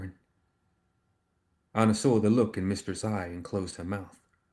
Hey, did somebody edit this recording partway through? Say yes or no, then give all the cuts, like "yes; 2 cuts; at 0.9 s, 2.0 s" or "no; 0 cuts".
no; 0 cuts